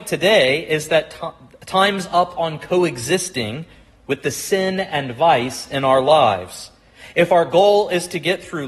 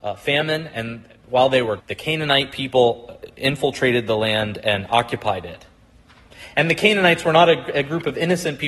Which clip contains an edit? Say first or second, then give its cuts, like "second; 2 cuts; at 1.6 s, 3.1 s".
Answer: second; 1 cut; at 1.8 s